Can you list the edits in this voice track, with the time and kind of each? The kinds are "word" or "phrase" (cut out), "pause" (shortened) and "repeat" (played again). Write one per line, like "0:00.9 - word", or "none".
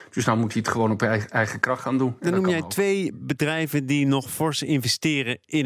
none